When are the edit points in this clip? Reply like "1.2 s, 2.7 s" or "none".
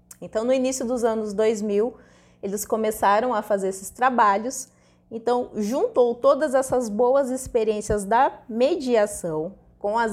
none